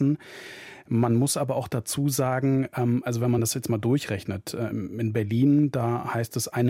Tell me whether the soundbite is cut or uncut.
uncut